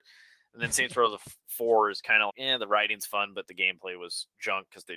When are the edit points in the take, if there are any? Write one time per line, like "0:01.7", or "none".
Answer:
0:02.3